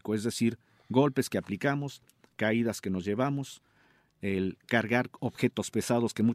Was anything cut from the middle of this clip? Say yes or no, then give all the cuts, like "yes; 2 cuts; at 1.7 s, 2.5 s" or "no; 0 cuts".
no; 0 cuts